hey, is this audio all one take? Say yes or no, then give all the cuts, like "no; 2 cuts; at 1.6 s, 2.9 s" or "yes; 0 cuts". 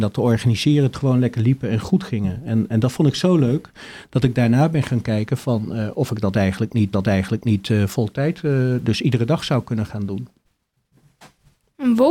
no; 2 cuts; at 0.9 s, 6.9 s